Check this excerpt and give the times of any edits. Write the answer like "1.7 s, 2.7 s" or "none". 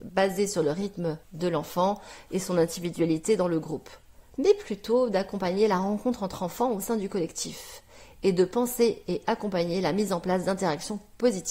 1.2 s

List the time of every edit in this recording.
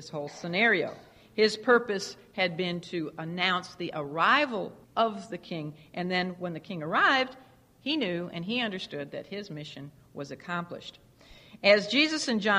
4.8 s

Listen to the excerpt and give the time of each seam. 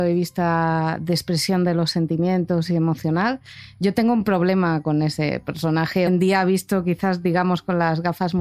6.1 s

